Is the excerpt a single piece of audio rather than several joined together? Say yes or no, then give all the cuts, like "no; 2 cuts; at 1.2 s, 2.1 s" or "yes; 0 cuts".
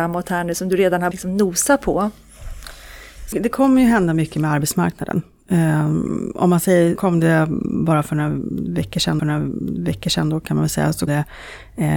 no; 5 cuts; at 1.1 s, 3.3 s, 7.0 s, 9.2 s, 11.1 s